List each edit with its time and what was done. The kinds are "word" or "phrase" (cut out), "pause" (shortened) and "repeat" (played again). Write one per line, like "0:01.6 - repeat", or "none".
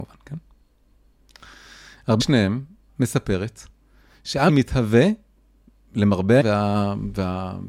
0:02.2 - word
0:02.9 - word
0:04.5 - word
0:06.4 - word